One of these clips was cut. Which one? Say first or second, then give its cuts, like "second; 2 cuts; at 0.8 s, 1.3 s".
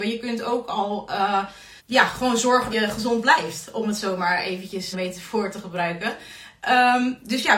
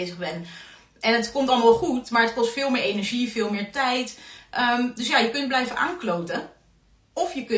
first; 3 cuts; at 1.8 s, 2.7 s, 4.9 s